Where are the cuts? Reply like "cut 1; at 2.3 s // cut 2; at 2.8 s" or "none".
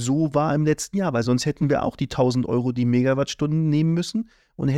none